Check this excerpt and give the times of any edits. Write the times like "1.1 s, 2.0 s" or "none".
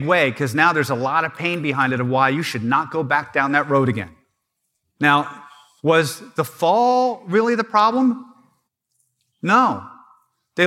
none